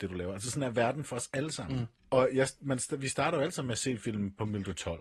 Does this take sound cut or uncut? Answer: cut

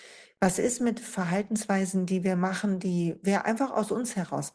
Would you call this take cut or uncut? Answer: uncut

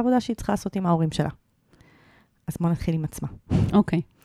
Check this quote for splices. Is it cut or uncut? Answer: uncut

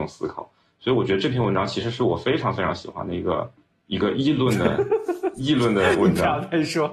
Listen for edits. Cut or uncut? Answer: uncut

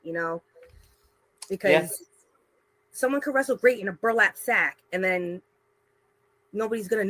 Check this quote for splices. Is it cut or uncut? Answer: uncut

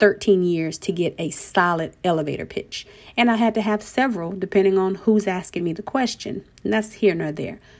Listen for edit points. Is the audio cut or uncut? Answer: uncut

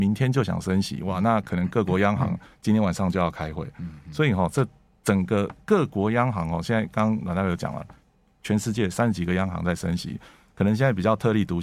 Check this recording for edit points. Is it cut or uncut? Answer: uncut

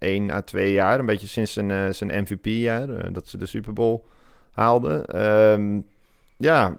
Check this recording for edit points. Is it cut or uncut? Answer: uncut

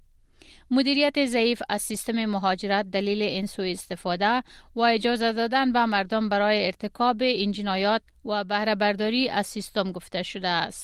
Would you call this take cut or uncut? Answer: uncut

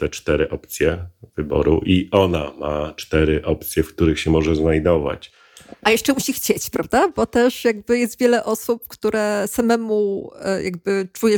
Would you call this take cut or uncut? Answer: uncut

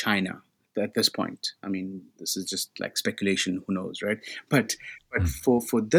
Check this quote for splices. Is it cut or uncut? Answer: uncut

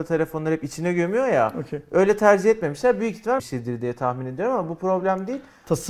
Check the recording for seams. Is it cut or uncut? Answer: cut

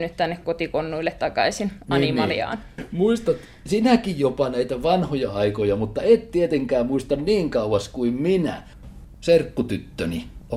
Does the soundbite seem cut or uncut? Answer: uncut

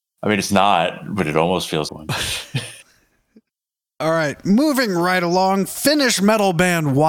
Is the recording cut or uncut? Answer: cut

